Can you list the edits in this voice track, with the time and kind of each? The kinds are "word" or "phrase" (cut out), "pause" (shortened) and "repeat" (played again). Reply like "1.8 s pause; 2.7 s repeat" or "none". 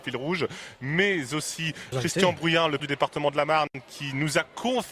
1.9 s word; 2.8 s word